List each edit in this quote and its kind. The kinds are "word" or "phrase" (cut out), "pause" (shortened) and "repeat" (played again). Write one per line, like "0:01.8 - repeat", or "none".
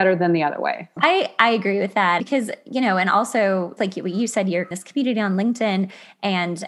0:01.0 - word
0:02.2 - word
0:03.8 - word
0:04.7 - word